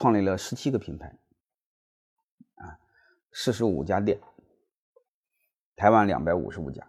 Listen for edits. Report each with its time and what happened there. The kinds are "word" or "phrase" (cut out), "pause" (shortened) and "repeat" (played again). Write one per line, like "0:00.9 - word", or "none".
none

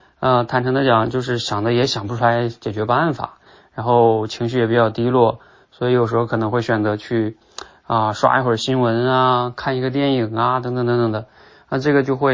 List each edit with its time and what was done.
none

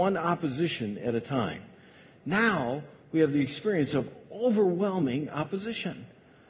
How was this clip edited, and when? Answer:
none

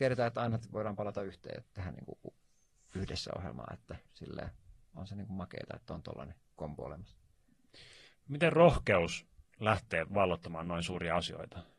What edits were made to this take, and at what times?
0:01.6 - word
0:04.1 - pause

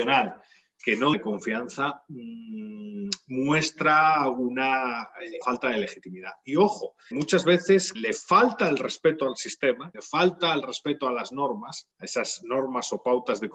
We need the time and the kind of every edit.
0:01.1 - word
0:05.4 - word
0:07.1 - word
0:07.9 - word
0:09.9 - word
0:11.9 - pause

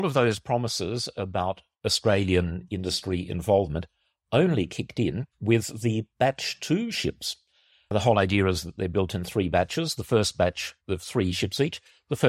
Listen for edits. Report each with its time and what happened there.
0:05.3 - pause
0:10.8 - pause

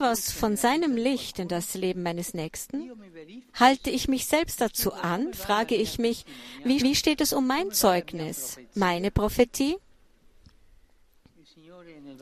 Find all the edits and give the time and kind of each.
0:03.5 - pause
0:06.8 - repeat

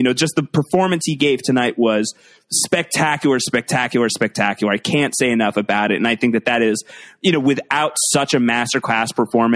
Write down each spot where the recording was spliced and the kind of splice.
none

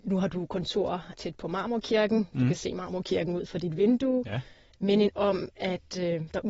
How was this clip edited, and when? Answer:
0:05.1 - word

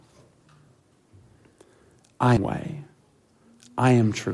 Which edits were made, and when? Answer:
0:02.4 - word

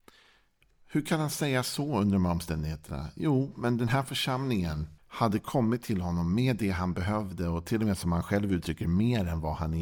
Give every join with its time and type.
0:05.0 - pause

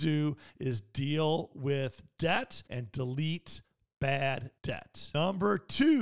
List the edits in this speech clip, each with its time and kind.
0:02.7 - pause
0:04.6 - pause

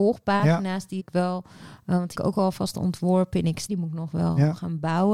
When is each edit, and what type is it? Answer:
0:01.0 - word
0:02.1 - word
0:03.7 - word

